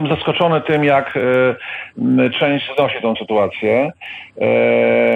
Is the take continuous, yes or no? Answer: no